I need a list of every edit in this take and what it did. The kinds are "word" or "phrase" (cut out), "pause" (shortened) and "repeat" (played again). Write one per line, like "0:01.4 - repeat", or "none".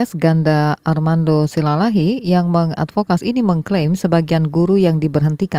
0:03.2 - word